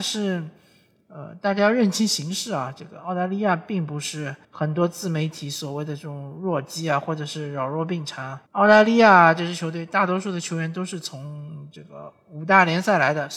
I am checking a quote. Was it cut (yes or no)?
yes